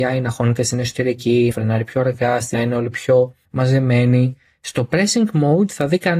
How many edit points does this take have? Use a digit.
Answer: 4